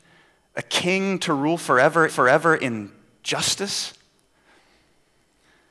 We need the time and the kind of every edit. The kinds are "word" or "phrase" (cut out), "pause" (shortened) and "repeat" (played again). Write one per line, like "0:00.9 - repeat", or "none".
0:02.1 - repeat